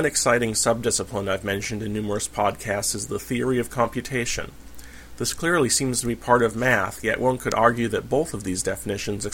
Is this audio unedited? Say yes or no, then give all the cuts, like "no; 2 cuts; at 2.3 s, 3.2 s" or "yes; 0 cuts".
yes; 0 cuts